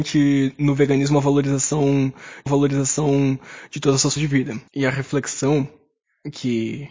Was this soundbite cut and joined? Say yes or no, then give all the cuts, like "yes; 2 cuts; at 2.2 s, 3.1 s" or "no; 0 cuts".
yes; 3 cuts; at 2.5 s, 4.2 s, 4.7 s